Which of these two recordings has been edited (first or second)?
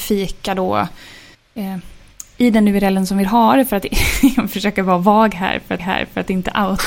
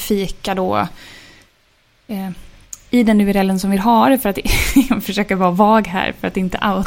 first